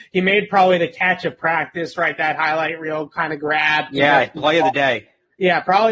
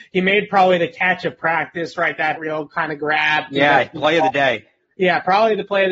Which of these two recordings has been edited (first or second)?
second